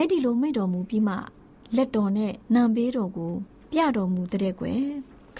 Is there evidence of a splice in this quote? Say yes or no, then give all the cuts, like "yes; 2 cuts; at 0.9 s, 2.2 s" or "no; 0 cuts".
yes; 1 cut; at 2.4 s